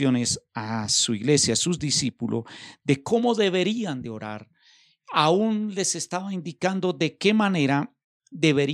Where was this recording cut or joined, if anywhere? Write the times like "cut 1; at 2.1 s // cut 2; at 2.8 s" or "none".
none

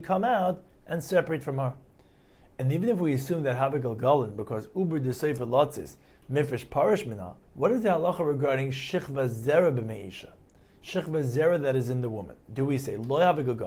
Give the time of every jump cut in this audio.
cut 1; at 7.4 s

